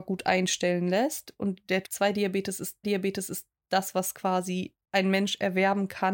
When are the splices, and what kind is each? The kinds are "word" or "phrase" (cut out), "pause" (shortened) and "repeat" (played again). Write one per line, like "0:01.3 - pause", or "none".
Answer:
0:01.8 - word
0:02.8 - repeat
0:04.8 - pause